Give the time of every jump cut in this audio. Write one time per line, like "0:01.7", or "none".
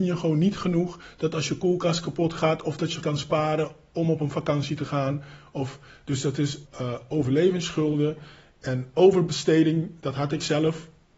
0:03.0
0:06.7